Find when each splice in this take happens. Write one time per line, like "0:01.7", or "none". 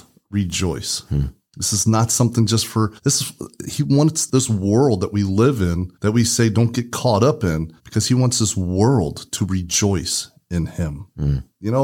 0:03.0
0:05.9
0:07.8